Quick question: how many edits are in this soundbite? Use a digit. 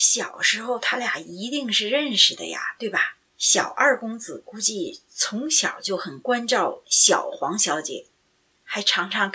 1